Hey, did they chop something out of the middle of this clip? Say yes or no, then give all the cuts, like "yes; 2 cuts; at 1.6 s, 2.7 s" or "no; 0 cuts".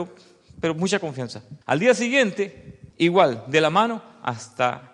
yes; 2 cuts; at 1.6 s, 2.9 s